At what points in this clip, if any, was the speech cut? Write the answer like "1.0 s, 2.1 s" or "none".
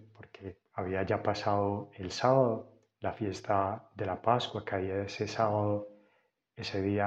none